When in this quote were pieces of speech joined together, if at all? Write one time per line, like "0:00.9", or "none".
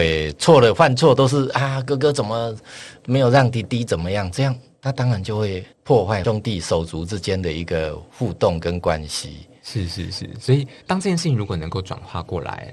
0:05.7
0:10.8